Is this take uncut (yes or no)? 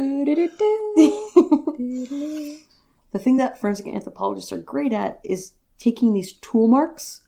yes